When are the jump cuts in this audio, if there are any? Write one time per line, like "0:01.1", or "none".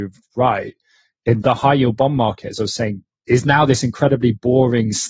0:01.4
0:03.1